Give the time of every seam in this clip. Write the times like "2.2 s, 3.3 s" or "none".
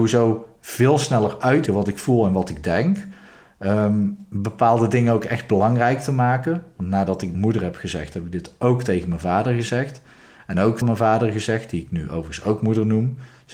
1.7 s, 7.3 s, 10.8 s

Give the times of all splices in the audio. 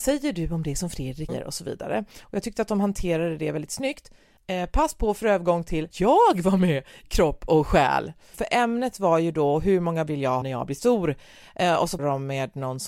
1.3 s, 5.9 s, 7.0 s, 10.1 s, 10.4 s, 12.0 s

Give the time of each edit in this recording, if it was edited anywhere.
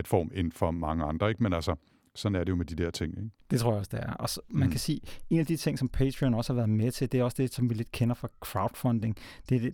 none

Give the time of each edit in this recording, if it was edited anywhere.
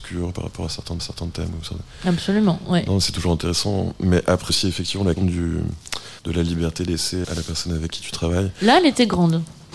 1.0 s, 4.5 s, 5.2 s, 6.2 s, 7.2 s

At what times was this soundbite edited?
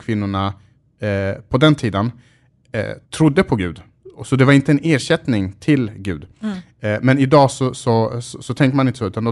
3.0 s

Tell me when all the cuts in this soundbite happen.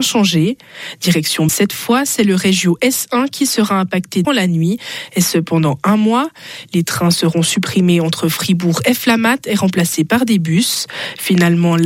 1.5 s, 4.2 s

